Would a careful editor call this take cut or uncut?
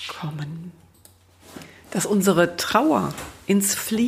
uncut